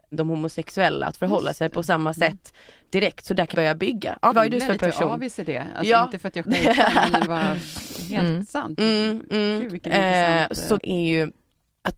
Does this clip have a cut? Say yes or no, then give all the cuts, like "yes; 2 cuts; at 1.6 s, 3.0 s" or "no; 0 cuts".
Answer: yes; 5 cuts; at 3.5 s, 4.3 s, 6.4 s, 7.3 s, 10.8 s